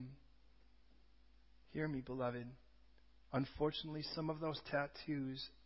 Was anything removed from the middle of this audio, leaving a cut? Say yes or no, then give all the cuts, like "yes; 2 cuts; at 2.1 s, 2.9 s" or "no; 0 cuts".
no; 0 cuts